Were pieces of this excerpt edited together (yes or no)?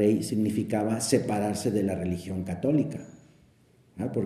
no